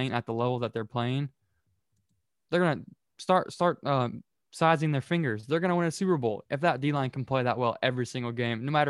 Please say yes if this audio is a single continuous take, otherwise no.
yes